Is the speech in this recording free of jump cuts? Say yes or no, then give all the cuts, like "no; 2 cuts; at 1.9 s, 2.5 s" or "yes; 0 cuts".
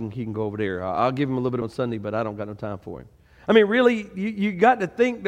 no; 1 cut; at 1.6 s